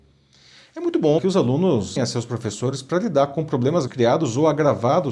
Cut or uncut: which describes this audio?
cut